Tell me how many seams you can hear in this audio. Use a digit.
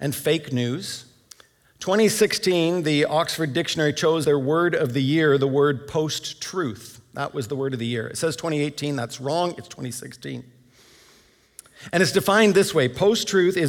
2